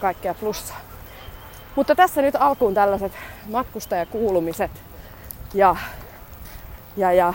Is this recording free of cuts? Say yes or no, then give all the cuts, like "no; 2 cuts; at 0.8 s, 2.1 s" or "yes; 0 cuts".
yes; 0 cuts